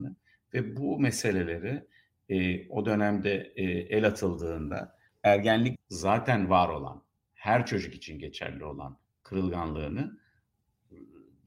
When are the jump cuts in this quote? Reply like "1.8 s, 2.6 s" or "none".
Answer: 5.8 s